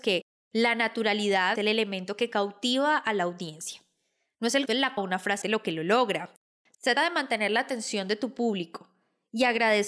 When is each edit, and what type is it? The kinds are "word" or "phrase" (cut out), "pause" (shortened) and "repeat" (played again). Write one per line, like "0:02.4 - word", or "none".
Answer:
0:01.6 - word
0:04.7 - word
0:05.0 - word
0:05.4 - word
0:07.0 - word